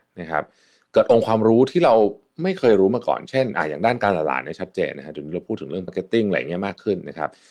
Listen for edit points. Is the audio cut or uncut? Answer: cut